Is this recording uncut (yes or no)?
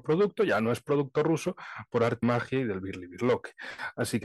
no